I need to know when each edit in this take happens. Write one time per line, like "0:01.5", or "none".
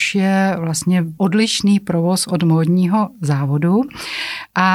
0:01.2